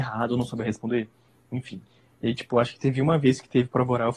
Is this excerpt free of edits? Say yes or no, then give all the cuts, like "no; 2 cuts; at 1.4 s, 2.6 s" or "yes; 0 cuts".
yes; 0 cuts